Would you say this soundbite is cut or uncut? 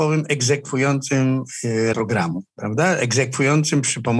cut